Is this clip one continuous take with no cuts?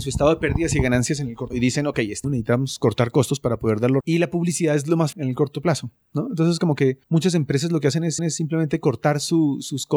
no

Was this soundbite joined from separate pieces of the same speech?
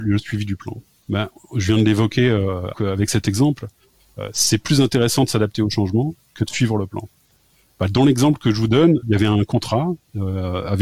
yes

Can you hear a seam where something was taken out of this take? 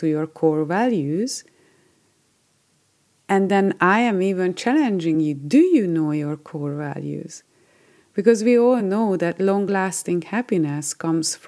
no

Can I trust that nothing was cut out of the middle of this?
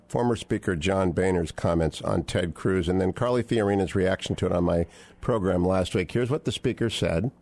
yes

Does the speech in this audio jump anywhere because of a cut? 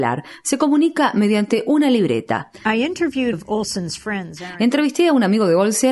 yes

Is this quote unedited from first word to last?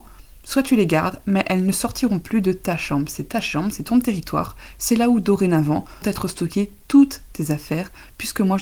no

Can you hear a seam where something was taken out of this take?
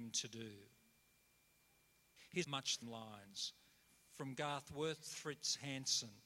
yes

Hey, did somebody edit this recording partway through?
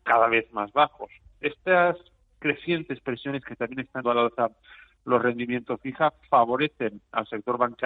yes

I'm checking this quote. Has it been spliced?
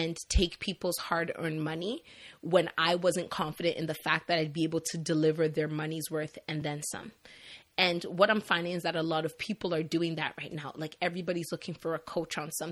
no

